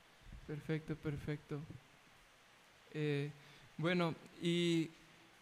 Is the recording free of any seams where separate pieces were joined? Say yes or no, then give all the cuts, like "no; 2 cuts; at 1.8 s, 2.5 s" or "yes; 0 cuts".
yes; 0 cuts